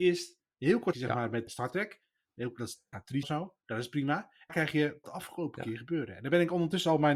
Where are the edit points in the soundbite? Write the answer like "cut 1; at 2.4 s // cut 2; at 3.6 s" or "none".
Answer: cut 1; at 0.9 s // cut 2; at 1.5 s // cut 3; at 2.9 s // cut 4; at 3.2 s // cut 5; at 4.5 s // cut 6; at 5.0 s